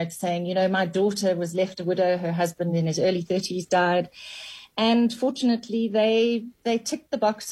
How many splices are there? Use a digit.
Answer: 0